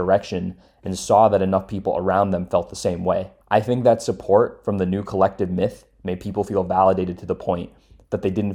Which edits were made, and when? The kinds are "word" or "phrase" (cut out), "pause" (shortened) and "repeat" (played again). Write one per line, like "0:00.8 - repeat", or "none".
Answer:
0:03.4 - pause